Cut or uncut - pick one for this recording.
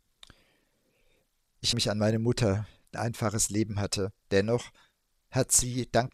cut